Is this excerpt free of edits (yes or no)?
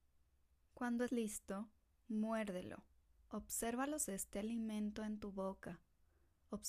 no